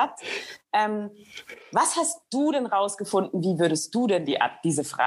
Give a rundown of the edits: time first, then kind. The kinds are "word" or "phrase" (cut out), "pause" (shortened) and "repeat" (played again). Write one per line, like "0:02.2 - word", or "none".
none